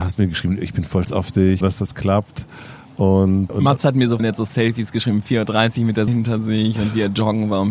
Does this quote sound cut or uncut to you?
cut